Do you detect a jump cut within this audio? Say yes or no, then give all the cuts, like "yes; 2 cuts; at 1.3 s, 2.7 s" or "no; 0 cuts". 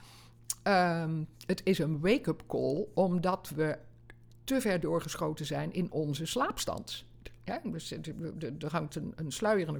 no; 0 cuts